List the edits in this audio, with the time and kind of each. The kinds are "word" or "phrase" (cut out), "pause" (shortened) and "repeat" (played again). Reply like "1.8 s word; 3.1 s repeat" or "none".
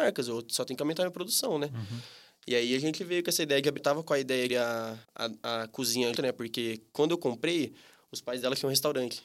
3.8 s phrase; 4.5 s word; 5.0 s pause; 6.2 s word

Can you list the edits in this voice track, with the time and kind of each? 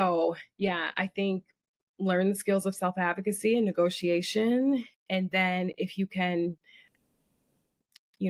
none

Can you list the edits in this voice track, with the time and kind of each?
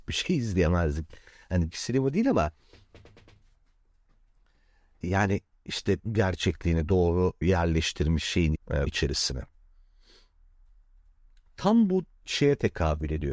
1.7 s word; 5.0 s word; 6.1 s word; 7.4 s word; 8.6 s word; 8.9 s word

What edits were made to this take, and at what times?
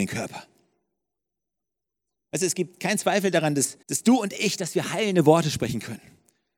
3.8 s pause

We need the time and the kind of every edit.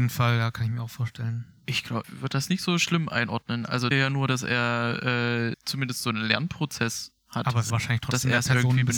2.0 s word; 3.9 s phrase; 5.5 s word; 7.2 s pause; 7.7 s word

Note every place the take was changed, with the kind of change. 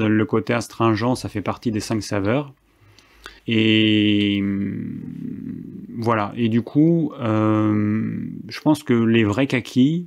3.4 s pause

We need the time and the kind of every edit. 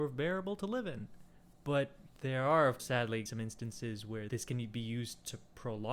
1.5 s pause; 2.8 s word; 3.3 s phrase; 4.3 s word

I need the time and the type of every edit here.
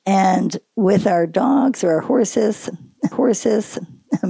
3.1 s repeat

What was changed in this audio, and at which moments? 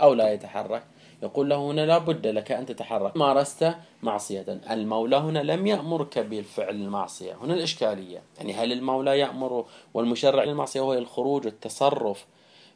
3.2 s word; 8.3 s pause; 10.5 s phrase

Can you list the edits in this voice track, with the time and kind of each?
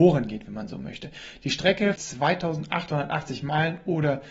2.0 s word

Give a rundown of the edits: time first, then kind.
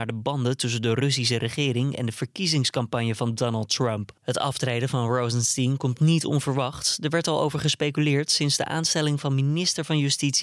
4.2 s pause

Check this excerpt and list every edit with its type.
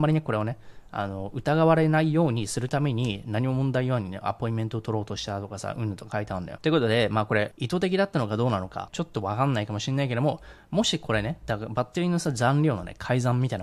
8.9 s word

